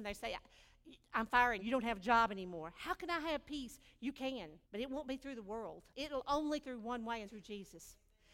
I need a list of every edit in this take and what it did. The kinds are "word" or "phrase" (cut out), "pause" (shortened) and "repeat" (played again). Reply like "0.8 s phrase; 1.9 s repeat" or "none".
1.6 s word; 4.6 s pause; 5.9 s pause; 6.6 s word; 7.2 s word